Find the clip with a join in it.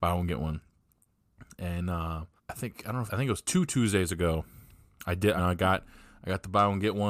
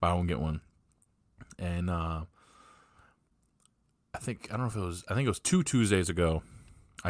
first; 3 cuts; at 2.4 s, 3.1 s, 5.4 s

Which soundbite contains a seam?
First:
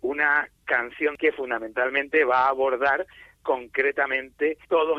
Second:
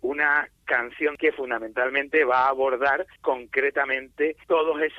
second; 1 cut; at 3.2 s

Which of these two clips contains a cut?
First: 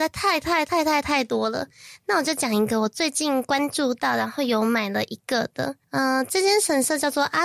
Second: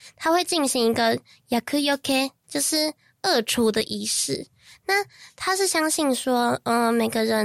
first; 1 cut; at 5.8 s

